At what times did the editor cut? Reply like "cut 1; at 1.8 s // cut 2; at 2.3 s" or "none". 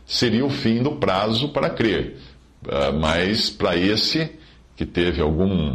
none